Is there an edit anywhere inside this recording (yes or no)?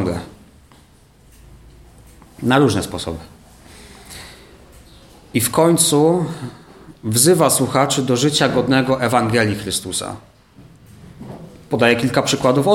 no